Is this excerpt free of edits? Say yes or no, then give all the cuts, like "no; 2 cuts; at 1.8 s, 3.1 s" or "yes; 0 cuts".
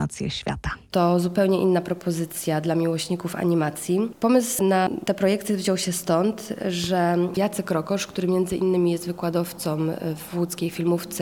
yes; 0 cuts